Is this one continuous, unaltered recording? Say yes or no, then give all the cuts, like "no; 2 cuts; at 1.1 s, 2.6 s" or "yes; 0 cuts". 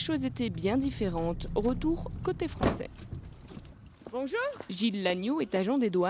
yes; 0 cuts